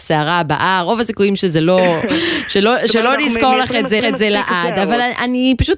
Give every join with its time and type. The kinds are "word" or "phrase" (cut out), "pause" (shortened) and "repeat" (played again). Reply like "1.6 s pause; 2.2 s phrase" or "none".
4.0 s repeat